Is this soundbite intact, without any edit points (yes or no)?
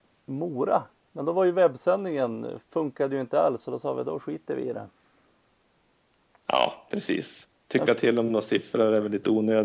yes